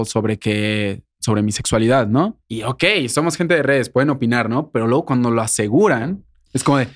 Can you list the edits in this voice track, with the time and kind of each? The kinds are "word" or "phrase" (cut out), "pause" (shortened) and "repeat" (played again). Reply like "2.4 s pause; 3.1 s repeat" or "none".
1.1 s pause; 2.4 s pause